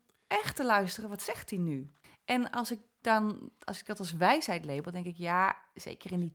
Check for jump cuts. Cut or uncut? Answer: cut